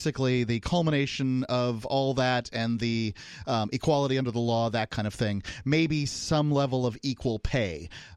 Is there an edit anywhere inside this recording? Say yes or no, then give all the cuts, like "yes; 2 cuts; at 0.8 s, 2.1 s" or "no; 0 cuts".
no; 0 cuts